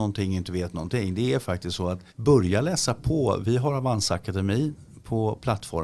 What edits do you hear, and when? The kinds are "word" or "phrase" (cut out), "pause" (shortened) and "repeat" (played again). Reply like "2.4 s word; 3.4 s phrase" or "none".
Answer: 2.1 s pause